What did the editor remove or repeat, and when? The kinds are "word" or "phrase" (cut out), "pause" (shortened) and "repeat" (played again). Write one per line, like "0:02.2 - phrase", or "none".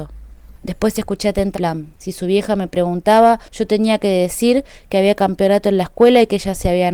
0:01.5 - word